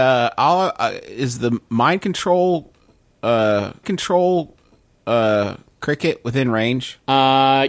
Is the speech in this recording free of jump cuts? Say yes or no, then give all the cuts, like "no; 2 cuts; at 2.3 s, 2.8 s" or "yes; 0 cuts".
no; 2 cuts; at 1.4 s, 3.8 s